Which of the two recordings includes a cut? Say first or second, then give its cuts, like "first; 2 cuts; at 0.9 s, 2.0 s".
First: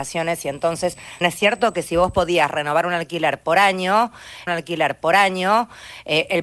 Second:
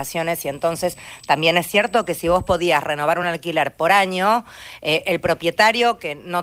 first; 2 cuts; at 1.2 s, 4.5 s